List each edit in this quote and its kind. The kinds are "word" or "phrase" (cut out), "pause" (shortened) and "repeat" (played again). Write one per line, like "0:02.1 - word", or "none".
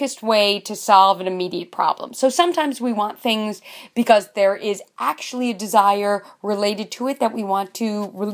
none